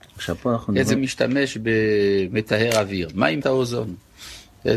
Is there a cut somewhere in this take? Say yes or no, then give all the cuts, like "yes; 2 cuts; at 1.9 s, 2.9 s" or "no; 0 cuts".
yes; 2 cuts; at 1.0 s, 3.4 s